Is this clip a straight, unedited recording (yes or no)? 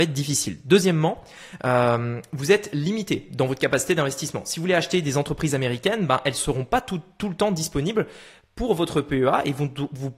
yes